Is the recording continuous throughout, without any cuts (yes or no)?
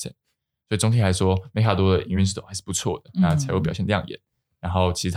yes